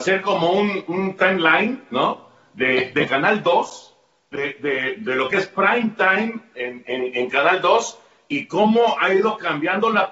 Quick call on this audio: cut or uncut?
uncut